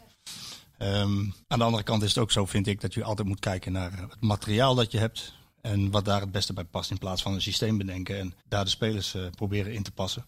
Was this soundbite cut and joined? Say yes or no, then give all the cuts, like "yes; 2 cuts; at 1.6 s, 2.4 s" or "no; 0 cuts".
yes; 2 cuts; at 1.4 s, 8.4 s